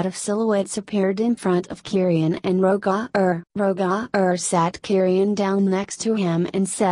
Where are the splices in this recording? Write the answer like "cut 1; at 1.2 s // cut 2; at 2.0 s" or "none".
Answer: cut 1; at 3.5 s